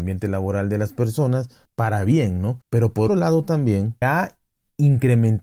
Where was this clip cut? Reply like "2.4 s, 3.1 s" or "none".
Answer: 2.6 s, 3.1 s, 4.0 s